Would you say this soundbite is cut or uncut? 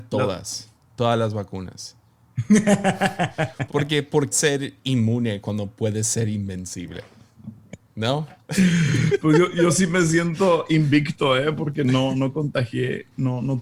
cut